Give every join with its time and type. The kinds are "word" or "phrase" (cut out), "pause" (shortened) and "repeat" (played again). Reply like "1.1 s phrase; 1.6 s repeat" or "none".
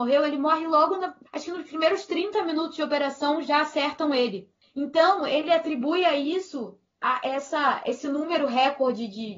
1.3 s pause